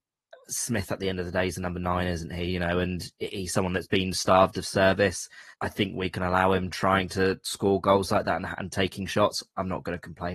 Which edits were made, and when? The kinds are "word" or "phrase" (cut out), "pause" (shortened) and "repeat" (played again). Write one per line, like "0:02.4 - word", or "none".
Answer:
0:05.5 - pause